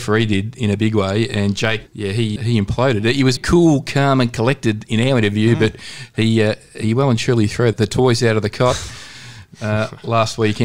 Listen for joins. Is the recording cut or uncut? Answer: cut